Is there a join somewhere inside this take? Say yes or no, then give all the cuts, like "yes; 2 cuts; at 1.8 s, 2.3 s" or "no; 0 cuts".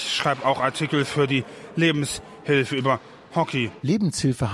no; 0 cuts